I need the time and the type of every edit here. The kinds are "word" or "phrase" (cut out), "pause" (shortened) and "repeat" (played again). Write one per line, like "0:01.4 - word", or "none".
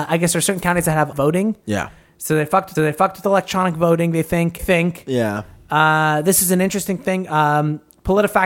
0:01.1 - word
0:02.7 - repeat
0:04.6 - word